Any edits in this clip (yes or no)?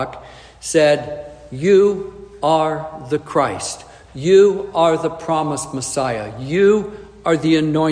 no